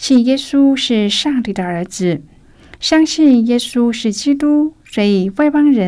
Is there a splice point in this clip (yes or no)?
no